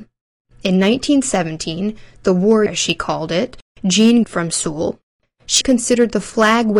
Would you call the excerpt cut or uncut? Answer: cut